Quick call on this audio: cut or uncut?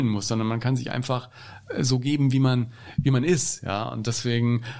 uncut